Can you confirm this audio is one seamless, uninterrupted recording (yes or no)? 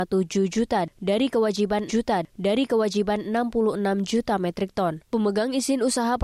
no